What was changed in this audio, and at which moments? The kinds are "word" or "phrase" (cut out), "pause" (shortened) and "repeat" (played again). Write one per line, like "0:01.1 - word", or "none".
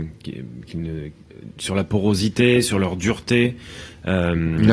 none